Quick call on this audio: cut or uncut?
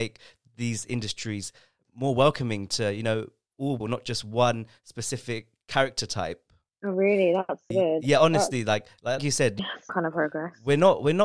cut